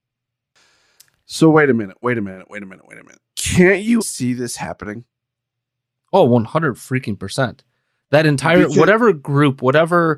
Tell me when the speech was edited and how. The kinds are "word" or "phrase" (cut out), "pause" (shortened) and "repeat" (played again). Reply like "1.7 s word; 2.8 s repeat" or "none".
3.3 s pause; 4.0 s word

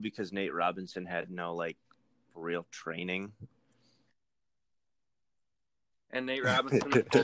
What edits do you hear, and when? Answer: none

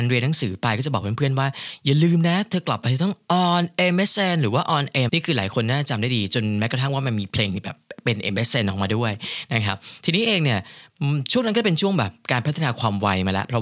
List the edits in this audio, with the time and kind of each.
5.1 s word

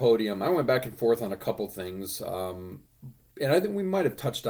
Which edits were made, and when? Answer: 3.2 s pause

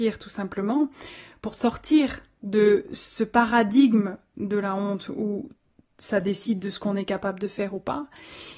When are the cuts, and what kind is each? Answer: none

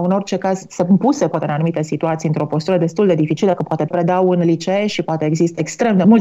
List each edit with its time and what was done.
3.9 s word

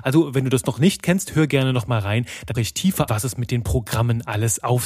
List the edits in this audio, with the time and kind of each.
2.5 s word; 3.1 s word

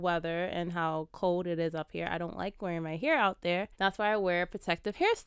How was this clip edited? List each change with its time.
3.7 s pause

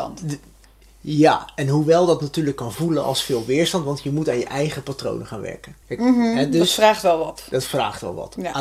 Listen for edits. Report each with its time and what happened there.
5.8 s pause

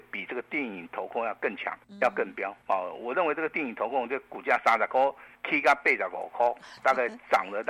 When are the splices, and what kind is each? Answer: 1.8 s word; 2.6 s pause; 5.3 s pause; 6.8 s word

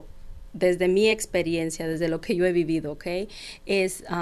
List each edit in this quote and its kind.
none

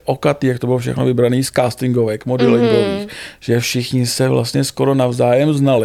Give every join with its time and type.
none

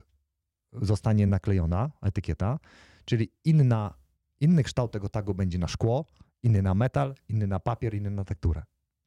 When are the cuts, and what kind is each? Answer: none

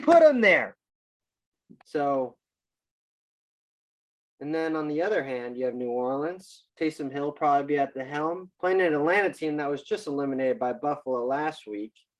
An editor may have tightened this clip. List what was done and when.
1.8 s pause; 6.7 s pause; 8.5 s pause

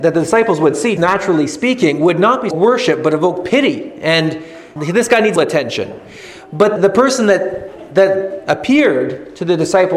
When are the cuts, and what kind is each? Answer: 1.0 s word; 2.5 s phrase; 4.8 s word; 5.4 s word; 6.8 s word

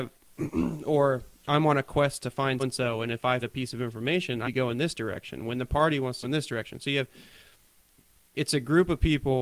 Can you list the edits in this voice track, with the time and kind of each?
2.6 s word; 3.4 s word; 4.4 s word; 6.2 s word

